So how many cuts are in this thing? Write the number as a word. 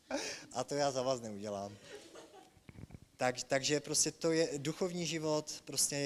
zero